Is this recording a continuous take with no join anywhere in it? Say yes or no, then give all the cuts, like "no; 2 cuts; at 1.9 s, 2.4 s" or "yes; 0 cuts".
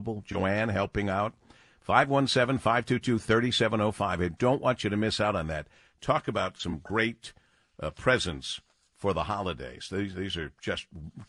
yes; 0 cuts